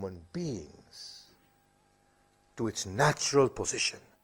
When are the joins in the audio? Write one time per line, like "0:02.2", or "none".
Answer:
none

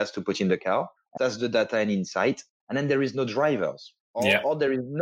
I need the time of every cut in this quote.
0:01.2

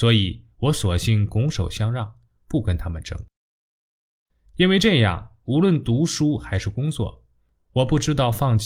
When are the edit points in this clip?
none

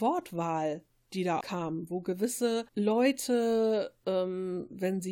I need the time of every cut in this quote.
0:01.4
0:02.7

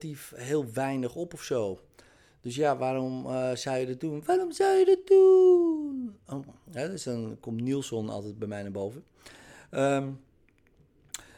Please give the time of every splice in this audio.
none

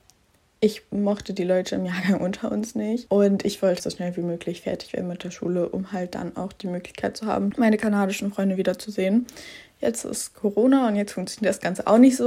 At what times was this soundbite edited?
0:03.8

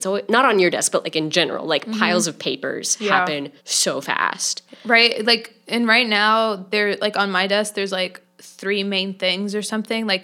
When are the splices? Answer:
0:03.6

